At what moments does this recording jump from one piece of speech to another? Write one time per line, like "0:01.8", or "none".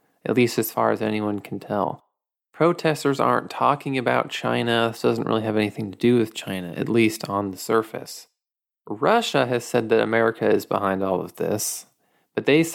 none